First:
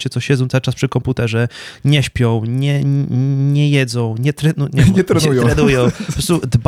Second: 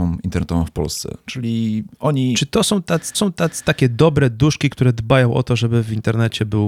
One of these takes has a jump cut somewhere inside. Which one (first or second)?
second